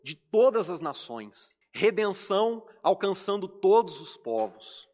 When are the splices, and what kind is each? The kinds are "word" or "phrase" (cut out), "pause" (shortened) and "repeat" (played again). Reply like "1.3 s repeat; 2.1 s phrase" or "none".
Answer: 1.6 s pause

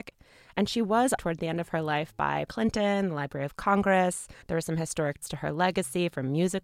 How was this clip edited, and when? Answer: 1.2 s word; 2.5 s word; 4.4 s pause; 5.2 s word

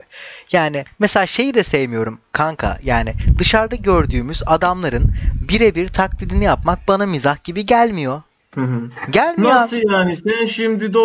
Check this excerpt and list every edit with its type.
none

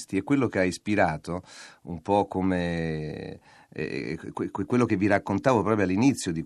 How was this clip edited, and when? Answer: none

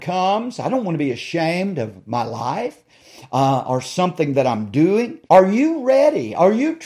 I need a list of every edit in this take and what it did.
5.3 s pause

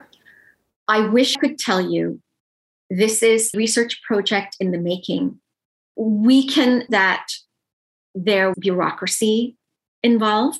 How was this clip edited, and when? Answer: 1.3 s word; 3.5 s word; 6.9 s word; 8.5 s word

